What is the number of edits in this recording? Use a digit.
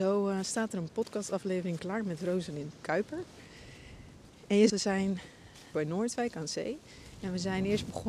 3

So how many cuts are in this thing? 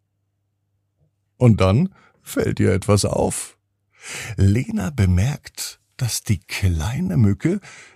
0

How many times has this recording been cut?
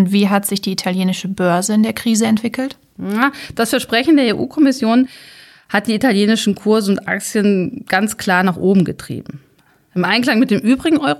0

